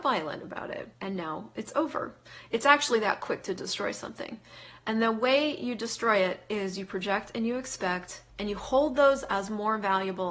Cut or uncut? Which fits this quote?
cut